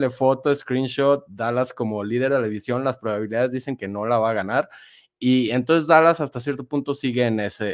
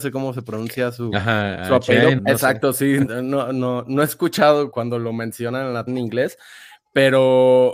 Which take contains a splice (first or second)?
second